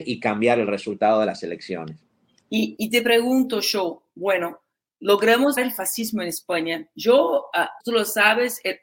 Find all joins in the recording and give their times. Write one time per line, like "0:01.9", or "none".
0:02.8
0:05.6
0:07.8